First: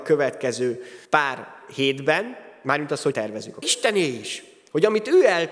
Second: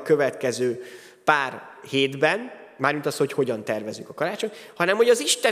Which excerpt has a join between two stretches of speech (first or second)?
first